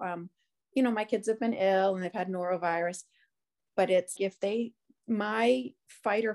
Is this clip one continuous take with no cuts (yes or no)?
no